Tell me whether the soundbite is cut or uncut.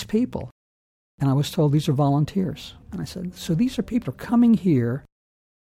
cut